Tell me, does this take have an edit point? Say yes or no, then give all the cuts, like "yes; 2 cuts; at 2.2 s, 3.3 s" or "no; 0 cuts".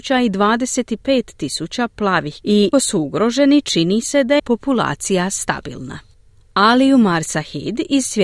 yes; 3 cuts; at 2.4 s, 2.7 s, 4.4 s